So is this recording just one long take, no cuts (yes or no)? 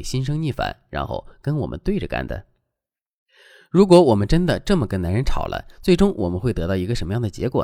yes